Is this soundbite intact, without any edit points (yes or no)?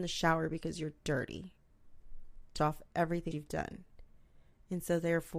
no